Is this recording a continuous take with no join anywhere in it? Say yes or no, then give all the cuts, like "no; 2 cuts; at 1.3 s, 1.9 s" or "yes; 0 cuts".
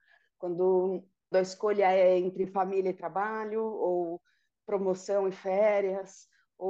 no; 1 cut; at 1.3 s